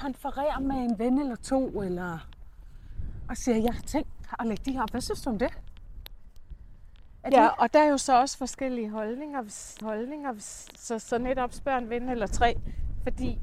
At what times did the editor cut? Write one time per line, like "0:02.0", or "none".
0:09.8